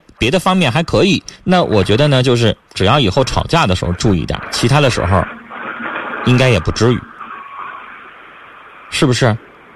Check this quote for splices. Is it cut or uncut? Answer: cut